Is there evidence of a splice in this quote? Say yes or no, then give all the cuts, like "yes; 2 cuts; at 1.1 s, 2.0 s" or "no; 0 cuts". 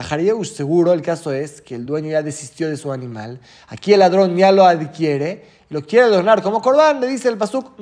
no; 0 cuts